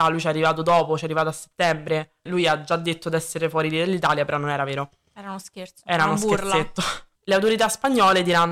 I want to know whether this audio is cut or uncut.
cut